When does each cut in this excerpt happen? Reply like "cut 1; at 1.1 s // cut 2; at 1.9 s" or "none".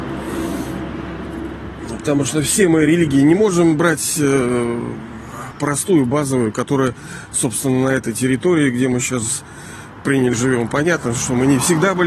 cut 1; at 5.5 s // cut 2; at 10.3 s